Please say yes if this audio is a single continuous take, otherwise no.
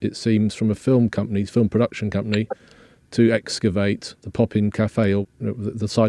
no